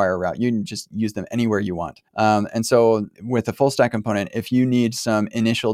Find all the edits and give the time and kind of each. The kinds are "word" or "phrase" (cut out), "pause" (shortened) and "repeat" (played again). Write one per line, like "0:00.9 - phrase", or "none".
0:02.1 - pause
0:03.1 - word